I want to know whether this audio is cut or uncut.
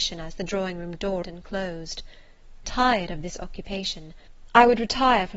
cut